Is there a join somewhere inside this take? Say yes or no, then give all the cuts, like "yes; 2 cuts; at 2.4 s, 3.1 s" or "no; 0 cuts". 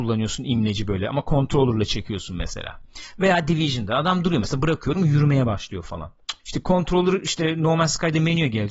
yes; 1 cut; at 6.4 s